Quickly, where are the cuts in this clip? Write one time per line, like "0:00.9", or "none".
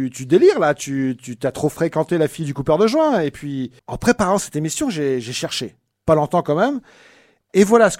0:03.8